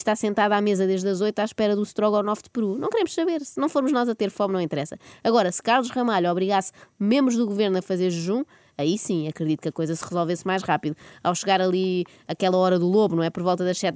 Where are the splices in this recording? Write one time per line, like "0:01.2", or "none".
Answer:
none